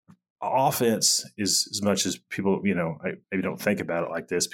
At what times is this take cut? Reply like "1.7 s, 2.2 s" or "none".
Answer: 3.2 s